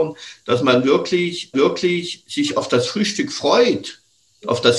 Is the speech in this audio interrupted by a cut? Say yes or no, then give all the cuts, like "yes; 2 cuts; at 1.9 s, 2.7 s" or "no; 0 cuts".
yes; 1 cut; at 1.5 s